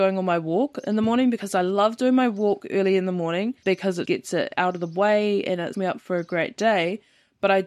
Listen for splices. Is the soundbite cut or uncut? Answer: cut